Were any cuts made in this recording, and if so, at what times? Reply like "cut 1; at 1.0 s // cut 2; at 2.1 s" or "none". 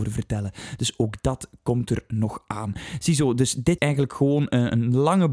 cut 1; at 3.8 s